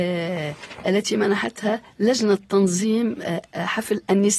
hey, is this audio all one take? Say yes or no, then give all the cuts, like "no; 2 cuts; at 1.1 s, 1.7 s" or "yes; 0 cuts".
yes; 0 cuts